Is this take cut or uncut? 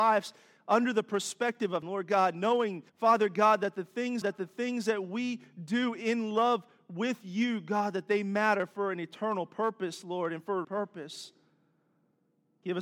cut